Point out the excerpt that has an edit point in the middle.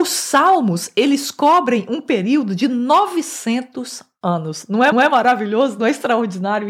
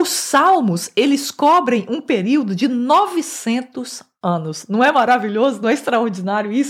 first; 1 cut; at 4.9 s

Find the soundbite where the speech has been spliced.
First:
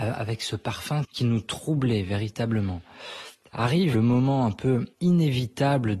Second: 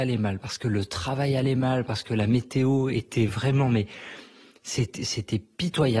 first; 3 cuts; at 1.0 s, 3.9 s, 4.9 s

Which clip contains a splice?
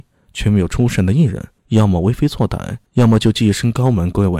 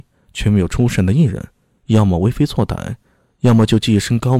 first; 2 cuts; at 1.6 s, 2.9 s

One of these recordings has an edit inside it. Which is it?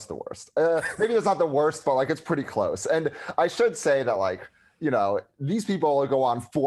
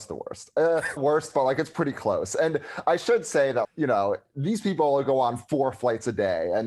second; 2 cuts; at 1.0 s, 3.6 s

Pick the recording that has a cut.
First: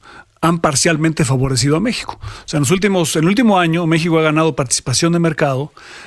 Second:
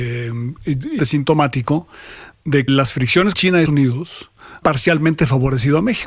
second; 5 cuts; at 1.0 s, 2.7 s, 3.3 s, 3.7 s, 4.6 s

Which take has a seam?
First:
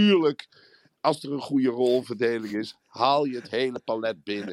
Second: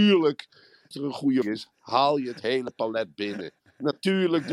second; 2 cuts; at 0.9 s, 1.4 s

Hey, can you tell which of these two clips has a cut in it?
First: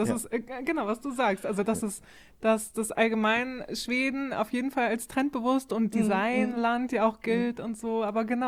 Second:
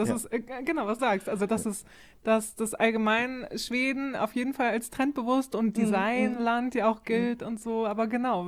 second; 1 cut; at 1.0 s

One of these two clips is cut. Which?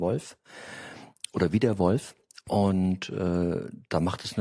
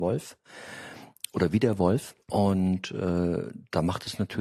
second; 1 cut; at 2.2 s

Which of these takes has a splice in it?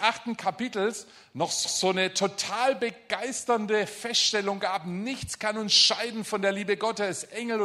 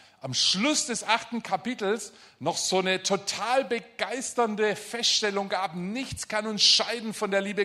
first; 1 cut; at 1.6 s

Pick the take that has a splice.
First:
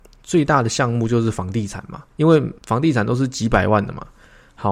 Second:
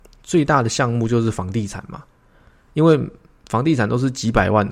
first; 2 cuts; at 2.1 s, 2.6 s

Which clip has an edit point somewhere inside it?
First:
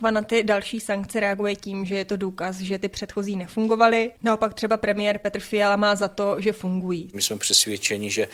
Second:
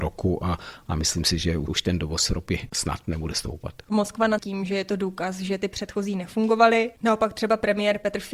second; 1 cut; at 4.4 s

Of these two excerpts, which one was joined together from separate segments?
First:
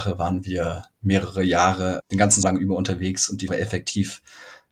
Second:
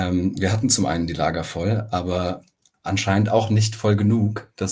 first; 3 cuts; at 2.0 s, 2.4 s, 3.5 s

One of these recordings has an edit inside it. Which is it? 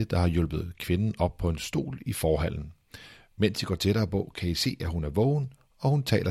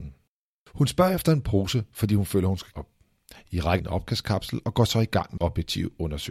second; 3 cuts; at 2.7 s, 3.8 s, 5.4 s

